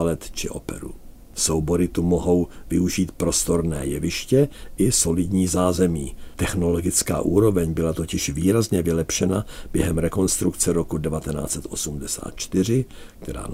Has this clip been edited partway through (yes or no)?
no